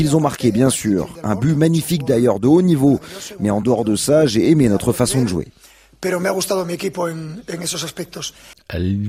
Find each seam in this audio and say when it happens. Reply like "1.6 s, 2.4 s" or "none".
none